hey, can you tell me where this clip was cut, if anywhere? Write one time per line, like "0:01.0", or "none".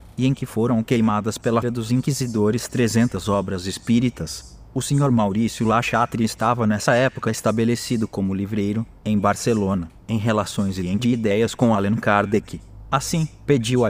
0:01.6
0:11.0